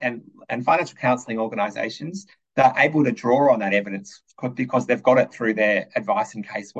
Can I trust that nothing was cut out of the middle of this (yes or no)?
yes